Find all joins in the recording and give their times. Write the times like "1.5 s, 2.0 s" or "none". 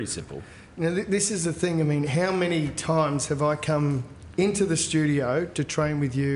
none